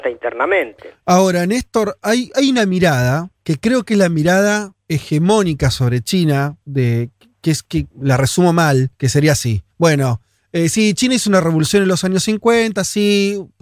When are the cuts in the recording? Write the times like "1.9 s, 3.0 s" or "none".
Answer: 3.3 s, 4.8 s, 6.6 s, 7.9 s, 8.9 s, 9.7 s